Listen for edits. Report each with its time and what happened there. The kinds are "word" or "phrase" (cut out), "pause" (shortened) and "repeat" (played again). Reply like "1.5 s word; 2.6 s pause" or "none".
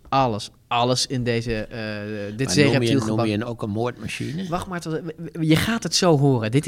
3.5 s word